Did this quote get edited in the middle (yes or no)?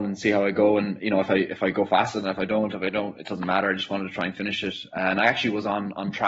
no